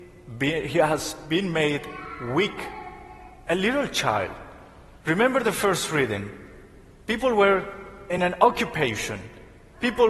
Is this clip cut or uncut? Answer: uncut